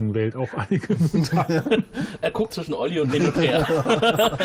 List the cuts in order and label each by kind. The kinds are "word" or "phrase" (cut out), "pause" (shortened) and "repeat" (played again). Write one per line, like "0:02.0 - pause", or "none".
0:02.5 - word
0:03.1 - word